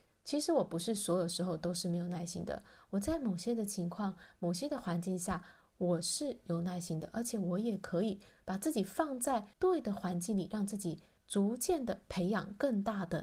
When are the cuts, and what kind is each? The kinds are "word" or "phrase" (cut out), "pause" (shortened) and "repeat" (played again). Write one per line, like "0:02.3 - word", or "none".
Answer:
0:09.5 - pause
0:11.2 - pause